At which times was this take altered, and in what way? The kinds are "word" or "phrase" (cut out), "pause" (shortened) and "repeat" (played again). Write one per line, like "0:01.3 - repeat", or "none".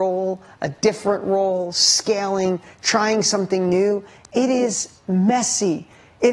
none